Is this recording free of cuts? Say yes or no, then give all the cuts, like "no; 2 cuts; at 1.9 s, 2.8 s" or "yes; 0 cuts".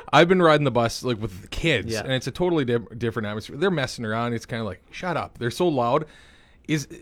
yes; 0 cuts